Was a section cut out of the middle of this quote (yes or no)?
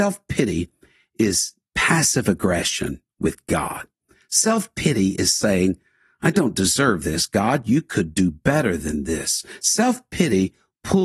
no